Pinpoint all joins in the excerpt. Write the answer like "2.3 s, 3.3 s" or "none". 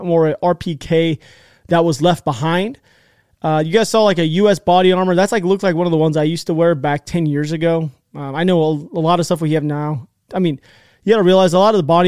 none